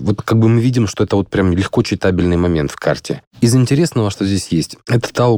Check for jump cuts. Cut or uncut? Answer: uncut